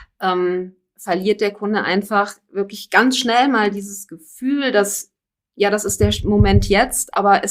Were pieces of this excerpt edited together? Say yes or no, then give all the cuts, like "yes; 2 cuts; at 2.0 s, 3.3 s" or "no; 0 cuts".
no; 0 cuts